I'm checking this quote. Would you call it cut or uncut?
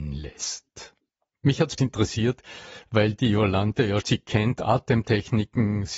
cut